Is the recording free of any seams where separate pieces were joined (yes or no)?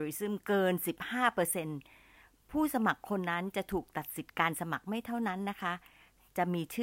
yes